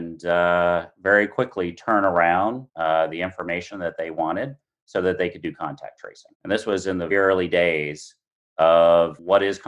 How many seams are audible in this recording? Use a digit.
3